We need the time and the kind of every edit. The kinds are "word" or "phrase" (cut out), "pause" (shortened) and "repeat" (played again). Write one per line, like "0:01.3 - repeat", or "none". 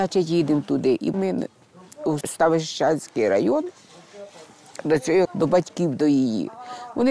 0:01.1 - word
0:02.2 - word
0:05.2 - word